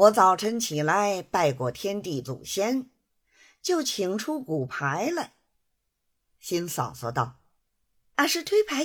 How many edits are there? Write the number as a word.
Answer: zero